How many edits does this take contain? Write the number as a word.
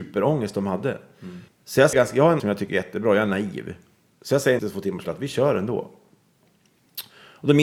five